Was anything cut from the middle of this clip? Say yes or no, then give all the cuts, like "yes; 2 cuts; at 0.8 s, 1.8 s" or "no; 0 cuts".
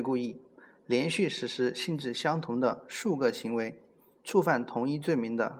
no; 0 cuts